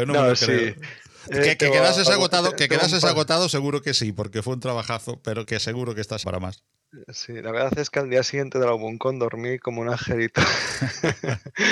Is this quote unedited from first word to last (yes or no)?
no